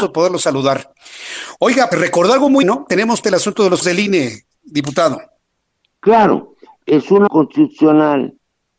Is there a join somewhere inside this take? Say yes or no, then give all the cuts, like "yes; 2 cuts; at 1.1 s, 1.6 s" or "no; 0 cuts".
yes; 6 cuts; at 1.9 s, 2.6 s, 3.2 s, 3.8 s, 6.8 s, 7.3 s